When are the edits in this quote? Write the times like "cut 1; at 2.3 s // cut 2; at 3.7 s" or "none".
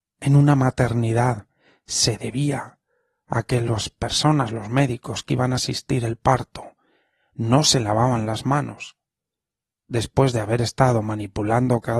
none